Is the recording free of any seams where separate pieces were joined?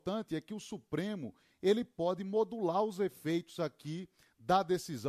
yes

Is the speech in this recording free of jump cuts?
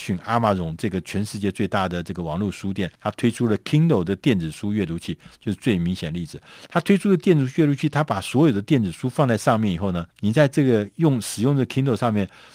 no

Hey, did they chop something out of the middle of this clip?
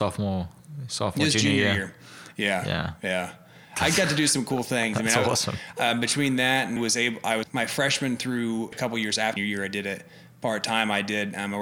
yes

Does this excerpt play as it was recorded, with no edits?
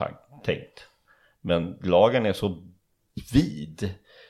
yes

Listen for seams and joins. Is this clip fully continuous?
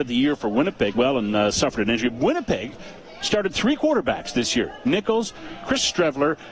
no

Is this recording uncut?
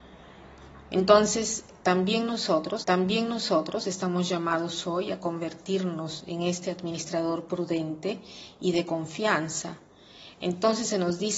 no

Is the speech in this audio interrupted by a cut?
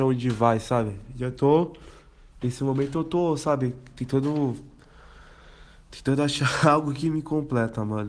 no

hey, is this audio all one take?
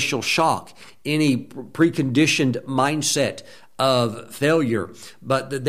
yes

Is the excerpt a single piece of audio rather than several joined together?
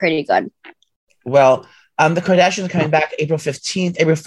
yes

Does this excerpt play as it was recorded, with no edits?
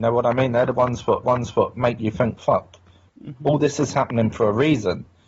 no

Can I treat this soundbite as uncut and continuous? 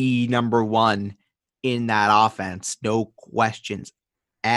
yes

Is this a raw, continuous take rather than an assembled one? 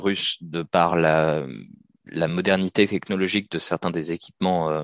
yes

